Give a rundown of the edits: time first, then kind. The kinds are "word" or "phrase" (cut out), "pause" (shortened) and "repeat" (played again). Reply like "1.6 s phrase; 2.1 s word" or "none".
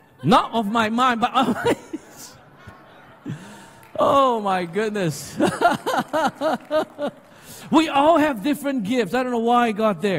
none